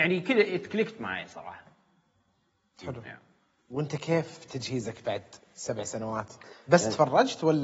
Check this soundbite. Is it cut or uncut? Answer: uncut